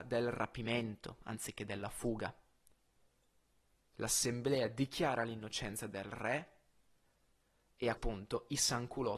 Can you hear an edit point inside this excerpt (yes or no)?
yes